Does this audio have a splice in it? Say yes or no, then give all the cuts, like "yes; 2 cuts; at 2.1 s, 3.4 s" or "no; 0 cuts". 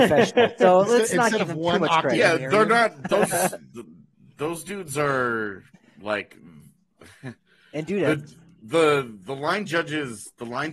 no; 0 cuts